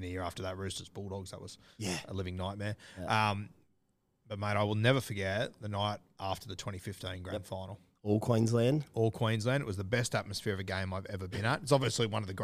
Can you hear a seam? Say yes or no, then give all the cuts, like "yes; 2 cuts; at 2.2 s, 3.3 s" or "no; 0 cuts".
no; 0 cuts